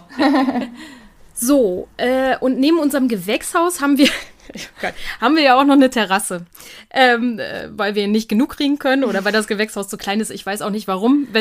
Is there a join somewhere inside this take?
no; 0 cuts

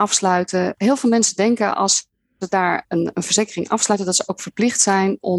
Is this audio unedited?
yes; 0 cuts

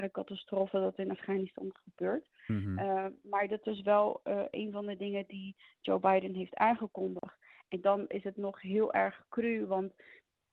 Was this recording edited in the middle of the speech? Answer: no; 0 cuts

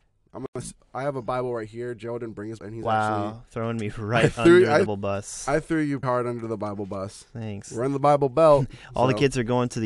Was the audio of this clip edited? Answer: yes; 3 cuts; at 2.6 s, 4.9 s, 6.0 s

